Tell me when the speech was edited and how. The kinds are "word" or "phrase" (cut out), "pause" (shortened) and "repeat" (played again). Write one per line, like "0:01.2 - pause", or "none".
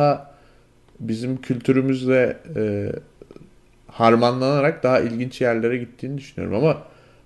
none